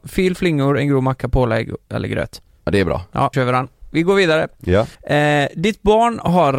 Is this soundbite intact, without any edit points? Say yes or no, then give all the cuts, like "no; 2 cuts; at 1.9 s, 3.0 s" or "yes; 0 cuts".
no; 2 cuts; at 3.3 s, 4.9 s